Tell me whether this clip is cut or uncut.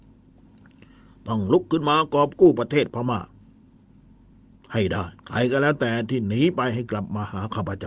cut